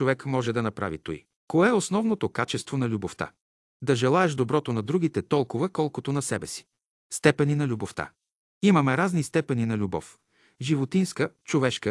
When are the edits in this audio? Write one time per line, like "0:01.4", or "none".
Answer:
0:01.3